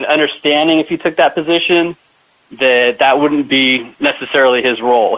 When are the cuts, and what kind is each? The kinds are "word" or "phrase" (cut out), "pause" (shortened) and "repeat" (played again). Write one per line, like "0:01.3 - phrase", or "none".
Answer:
none